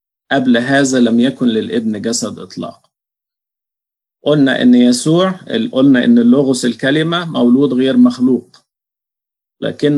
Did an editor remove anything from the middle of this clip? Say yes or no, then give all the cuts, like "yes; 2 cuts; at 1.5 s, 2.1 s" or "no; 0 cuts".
no; 0 cuts